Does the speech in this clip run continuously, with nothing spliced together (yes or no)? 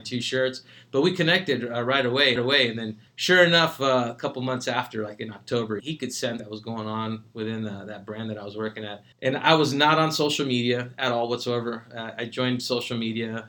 no